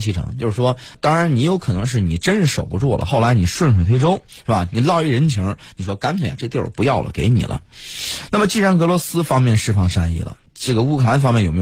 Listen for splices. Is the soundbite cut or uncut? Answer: cut